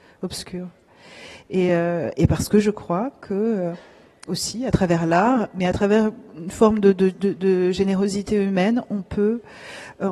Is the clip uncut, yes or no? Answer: yes